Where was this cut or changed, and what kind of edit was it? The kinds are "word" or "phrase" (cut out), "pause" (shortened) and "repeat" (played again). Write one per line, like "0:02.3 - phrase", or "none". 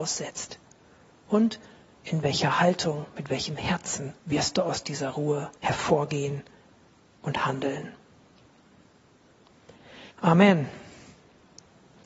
0:04.2 - pause
0:05.6 - pause
0:10.1 - pause